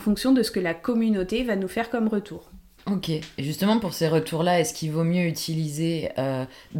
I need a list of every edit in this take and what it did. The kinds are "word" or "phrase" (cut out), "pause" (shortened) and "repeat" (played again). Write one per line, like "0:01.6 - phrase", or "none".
none

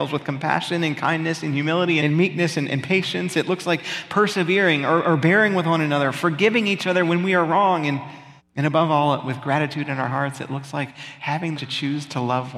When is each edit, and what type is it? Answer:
0:02.0 - word
0:08.4 - pause
0:11.5 - phrase

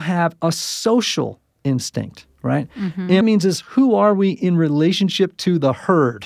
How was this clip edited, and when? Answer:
0:03.2 - phrase

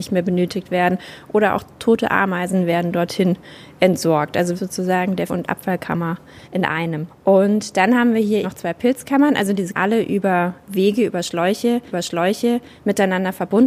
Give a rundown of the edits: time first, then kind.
0:04.5 - word
0:05.3 - word
0:06.4 - pause
0:08.4 - word
0:09.7 - phrase
0:11.9 - repeat

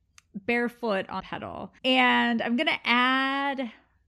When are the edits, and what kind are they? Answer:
0:01.2 - phrase
0:01.8 - pause

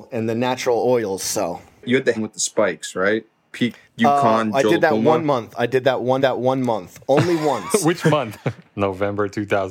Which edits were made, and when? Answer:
0:02.2 - word
0:03.8 - pause
0:06.2 - repeat

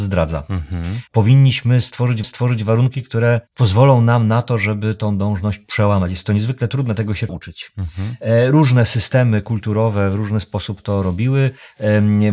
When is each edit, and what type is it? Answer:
0:01.1 - pause
0:02.2 - repeat
0:03.5 - pause
0:07.3 - word

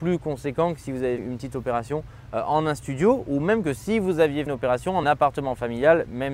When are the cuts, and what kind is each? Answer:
0:01.2 - word
0:04.5 - word
0:05.0 - word

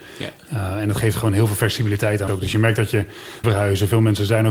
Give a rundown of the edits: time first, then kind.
0:02.3 - word
0:03.4 - phrase

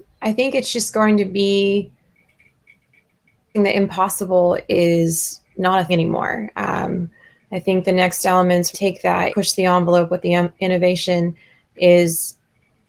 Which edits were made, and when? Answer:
0:03.5 - word
0:05.9 - word
0:08.7 - phrase
0:09.3 - word

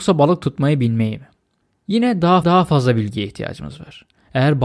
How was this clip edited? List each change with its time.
0:01.6 - pause
0:02.4 - repeat

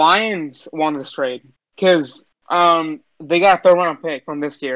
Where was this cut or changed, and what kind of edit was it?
0:01.6 - pause

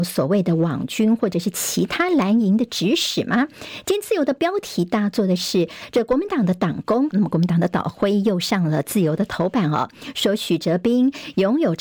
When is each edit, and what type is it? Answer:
0:07.1 - word

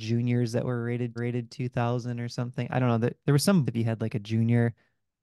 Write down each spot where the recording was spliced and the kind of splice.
0:01.2 - repeat
0:03.7 - word

